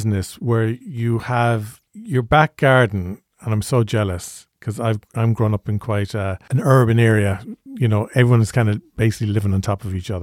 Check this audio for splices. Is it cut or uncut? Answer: uncut